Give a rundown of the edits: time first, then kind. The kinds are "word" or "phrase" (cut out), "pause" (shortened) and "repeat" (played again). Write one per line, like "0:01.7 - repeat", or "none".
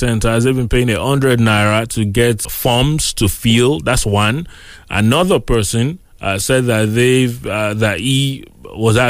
0:02.4 - word